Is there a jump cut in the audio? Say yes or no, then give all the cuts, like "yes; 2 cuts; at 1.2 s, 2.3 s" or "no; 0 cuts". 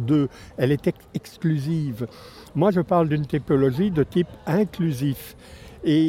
no; 0 cuts